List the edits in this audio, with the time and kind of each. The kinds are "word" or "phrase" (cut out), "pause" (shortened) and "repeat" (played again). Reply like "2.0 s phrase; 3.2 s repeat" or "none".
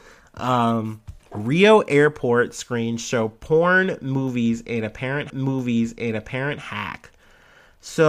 1.2 s pause; 5.3 s repeat